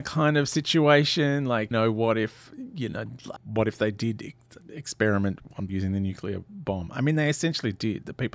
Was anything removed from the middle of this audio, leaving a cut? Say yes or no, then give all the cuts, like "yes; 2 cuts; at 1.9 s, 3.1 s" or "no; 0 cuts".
yes; 3 cuts; at 1.7 s, 3.4 s, 5.7 s